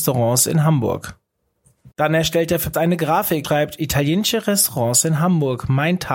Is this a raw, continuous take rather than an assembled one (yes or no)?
no